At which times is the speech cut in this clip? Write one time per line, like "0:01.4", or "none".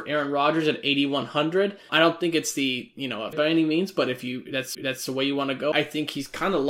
0:01.9
0:03.3
0:04.7
0:05.7